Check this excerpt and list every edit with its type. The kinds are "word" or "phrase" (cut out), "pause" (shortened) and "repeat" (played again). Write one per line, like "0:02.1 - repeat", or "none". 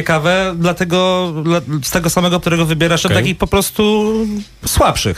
0:02.4 - word
0:03.0 - phrase
0:03.4 - word

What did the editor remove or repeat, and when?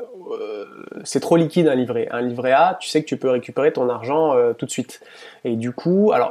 none

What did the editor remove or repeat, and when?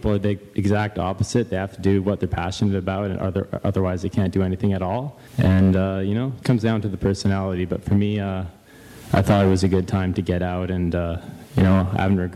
0:05.3 - pause
0:06.4 - word

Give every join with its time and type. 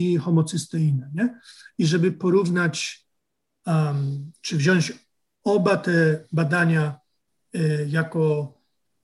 none

